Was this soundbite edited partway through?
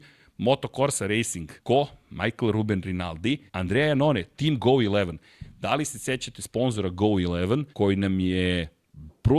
yes; 3 cuts; at 1.6 s, 3.5 s, 7.7 s

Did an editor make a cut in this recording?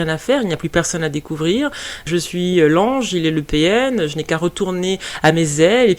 no; 0 cuts

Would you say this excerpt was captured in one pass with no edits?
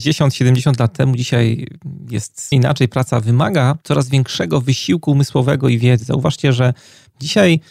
no; 2 cuts; at 2.5 s, 3.8 s

